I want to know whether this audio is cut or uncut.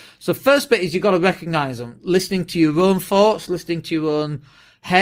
uncut